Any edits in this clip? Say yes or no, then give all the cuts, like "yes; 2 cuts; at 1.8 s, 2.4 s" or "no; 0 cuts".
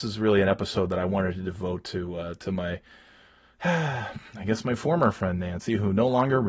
no; 0 cuts